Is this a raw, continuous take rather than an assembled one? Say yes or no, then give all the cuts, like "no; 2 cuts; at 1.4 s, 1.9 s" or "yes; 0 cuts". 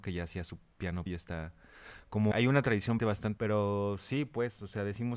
no; 4 cuts; at 1.1 s, 2.3 s, 3.0 s, 3.4 s